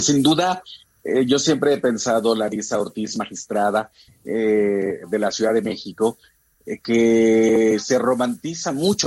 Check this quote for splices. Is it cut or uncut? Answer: uncut